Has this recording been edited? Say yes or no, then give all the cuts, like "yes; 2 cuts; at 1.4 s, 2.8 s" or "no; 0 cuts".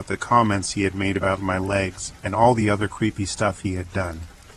no; 0 cuts